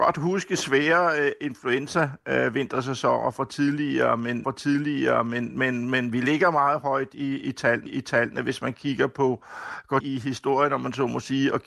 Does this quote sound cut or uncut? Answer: cut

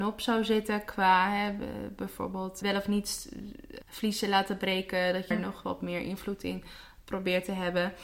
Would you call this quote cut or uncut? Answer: cut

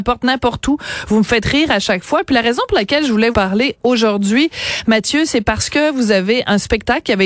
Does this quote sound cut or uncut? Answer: cut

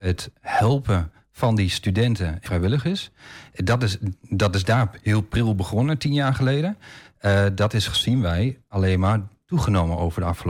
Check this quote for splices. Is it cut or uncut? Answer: cut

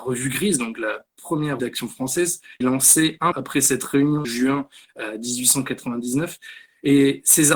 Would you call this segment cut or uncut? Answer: cut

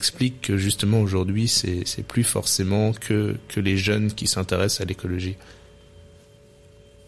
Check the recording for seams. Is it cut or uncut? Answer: uncut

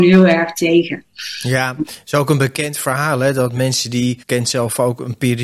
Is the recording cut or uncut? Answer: cut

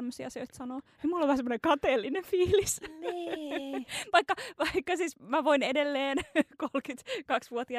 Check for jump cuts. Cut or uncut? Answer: uncut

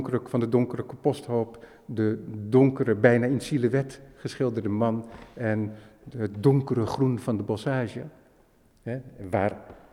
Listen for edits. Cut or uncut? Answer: uncut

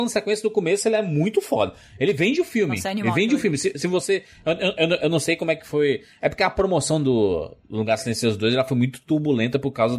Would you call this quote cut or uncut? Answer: uncut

